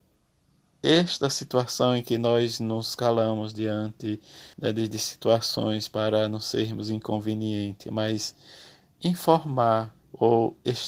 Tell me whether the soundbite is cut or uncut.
cut